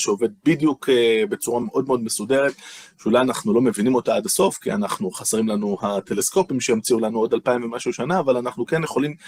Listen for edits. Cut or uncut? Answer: uncut